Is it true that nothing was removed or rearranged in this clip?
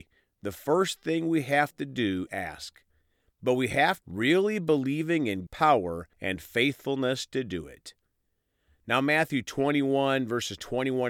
no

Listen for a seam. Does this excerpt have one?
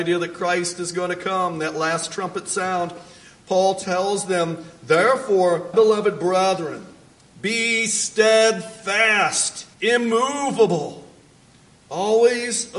yes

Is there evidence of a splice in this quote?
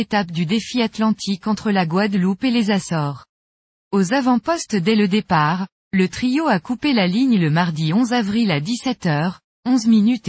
no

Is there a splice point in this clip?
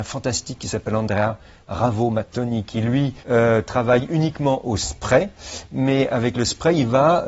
yes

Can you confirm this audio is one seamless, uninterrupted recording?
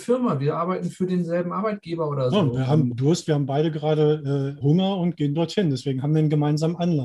no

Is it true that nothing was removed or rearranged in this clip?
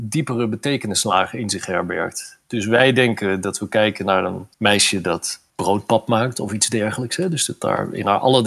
no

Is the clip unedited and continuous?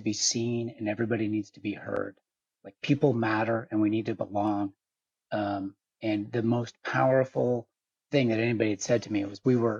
yes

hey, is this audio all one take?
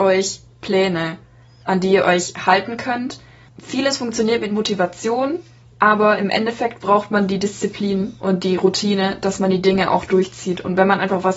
yes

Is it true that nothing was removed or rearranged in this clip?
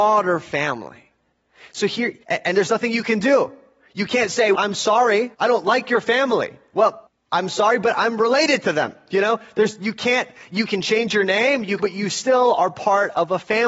no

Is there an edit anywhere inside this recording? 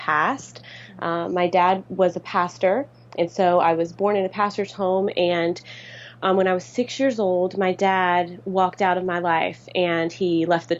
no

